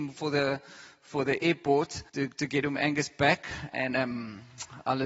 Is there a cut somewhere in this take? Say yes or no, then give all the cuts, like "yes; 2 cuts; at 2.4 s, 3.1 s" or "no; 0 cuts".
yes; 1 cut; at 2.1 s